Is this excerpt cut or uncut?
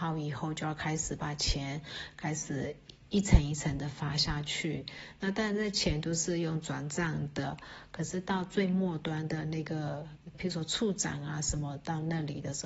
cut